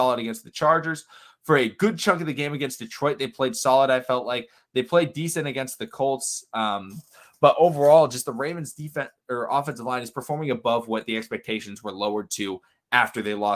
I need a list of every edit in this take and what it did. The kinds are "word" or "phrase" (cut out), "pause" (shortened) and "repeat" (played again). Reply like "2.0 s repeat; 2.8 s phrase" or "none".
none